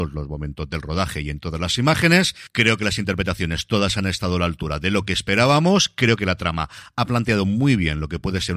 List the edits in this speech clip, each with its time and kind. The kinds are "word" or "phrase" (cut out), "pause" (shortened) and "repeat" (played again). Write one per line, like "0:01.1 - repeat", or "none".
none